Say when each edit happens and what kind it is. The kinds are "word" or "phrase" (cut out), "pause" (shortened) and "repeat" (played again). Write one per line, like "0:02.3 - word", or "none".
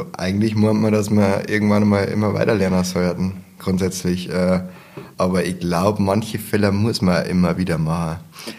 0:03.6 - word
0:05.1 - pause